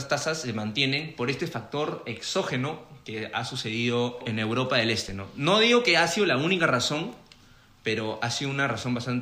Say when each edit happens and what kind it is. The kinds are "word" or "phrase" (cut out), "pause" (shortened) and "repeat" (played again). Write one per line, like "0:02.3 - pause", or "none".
0:04.2 - word